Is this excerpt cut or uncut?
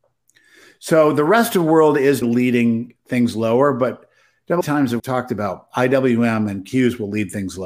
cut